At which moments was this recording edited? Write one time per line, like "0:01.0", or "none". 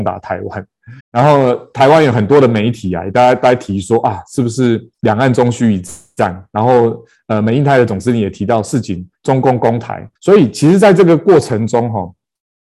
0:01.0
0:04.9
0:10.2